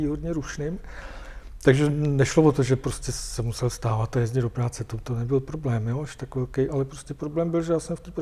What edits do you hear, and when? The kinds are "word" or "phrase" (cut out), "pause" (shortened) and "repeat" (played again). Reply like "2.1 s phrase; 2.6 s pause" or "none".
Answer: 6.7 s word